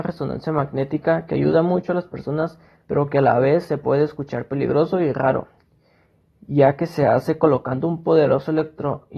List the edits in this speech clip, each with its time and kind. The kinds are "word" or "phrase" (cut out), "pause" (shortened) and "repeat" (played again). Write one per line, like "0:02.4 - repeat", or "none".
none

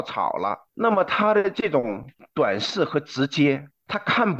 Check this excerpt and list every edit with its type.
none

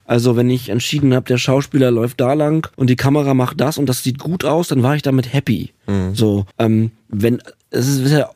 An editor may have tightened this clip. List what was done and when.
0:02.7 - pause
0:06.5 - pause

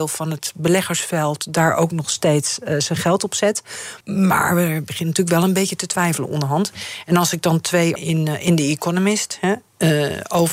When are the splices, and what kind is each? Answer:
0:04.0 - pause
0:07.9 - phrase

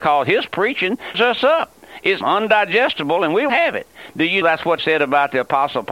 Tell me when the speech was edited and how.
0:01.1 - word
0:02.2 - word
0:03.5 - word
0:04.4 - word
0:04.8 - word

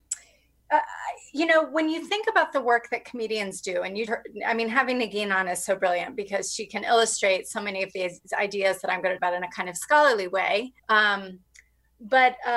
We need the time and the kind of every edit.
0:04.1 - word
0:09.2 - word
0:10.8 - pause

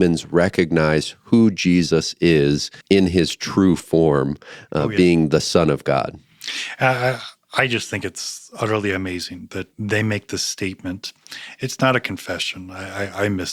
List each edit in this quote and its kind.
0:02.8 - pause
0:09.7 - pause

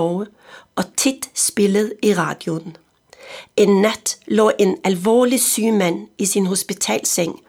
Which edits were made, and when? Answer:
none

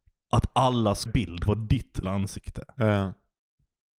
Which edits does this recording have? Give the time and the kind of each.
0:01.1 - phrase
0:01.5 - word
0:02.0 - word

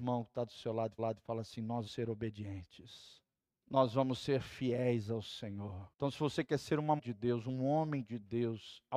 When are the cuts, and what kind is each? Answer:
0:01.0 - repeat
0:01.9 - word
0:03.4 - pause
0:05.9 - pause
0:07.0 - word

